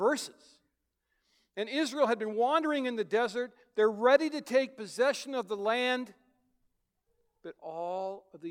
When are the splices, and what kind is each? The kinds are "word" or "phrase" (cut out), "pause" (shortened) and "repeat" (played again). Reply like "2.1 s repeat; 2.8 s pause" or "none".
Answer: none